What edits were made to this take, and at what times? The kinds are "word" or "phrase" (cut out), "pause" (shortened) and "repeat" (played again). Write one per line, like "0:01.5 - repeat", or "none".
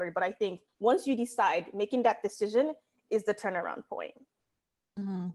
none